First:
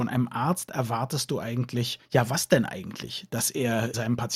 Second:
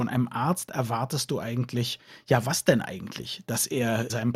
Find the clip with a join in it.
first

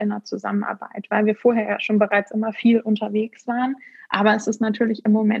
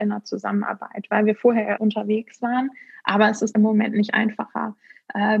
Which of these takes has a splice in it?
second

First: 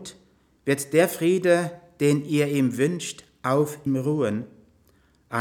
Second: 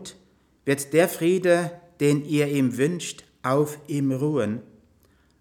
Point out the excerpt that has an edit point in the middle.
first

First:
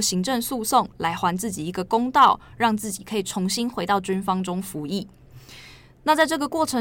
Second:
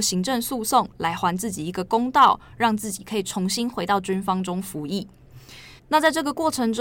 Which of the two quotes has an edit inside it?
second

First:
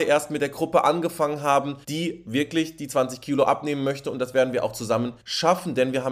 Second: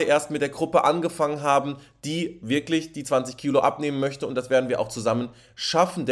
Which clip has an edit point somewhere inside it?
first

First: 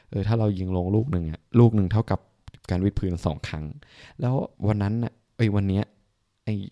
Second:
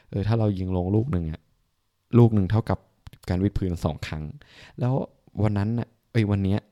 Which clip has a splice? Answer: first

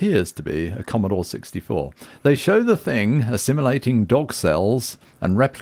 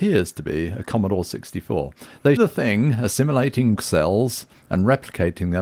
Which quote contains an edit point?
second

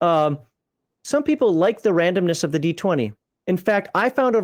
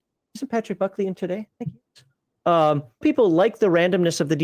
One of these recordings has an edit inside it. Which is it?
second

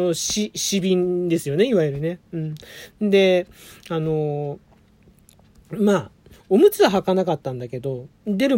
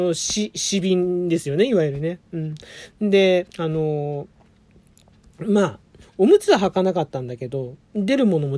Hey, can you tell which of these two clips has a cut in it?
second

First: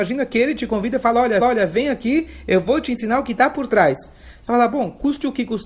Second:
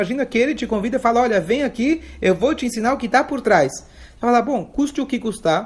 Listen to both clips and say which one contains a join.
first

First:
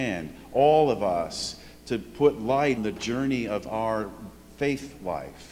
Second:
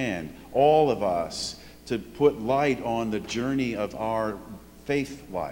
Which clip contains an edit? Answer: first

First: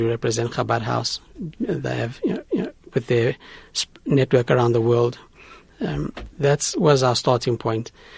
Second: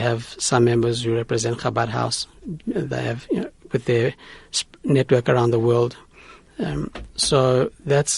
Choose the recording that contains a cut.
first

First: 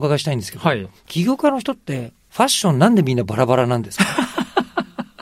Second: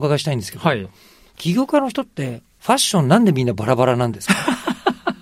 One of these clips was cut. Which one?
first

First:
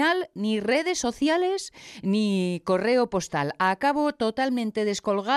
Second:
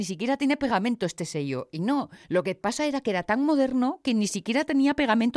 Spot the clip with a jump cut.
second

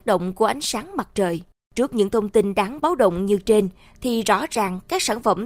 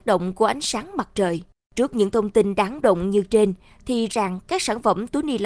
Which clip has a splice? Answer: second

